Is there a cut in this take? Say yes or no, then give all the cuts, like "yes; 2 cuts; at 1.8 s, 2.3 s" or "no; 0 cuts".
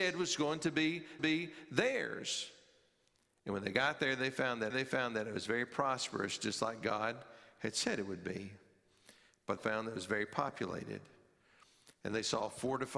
yes; 3 cuts; at 1.2 s, 4.7 s, 9.6 s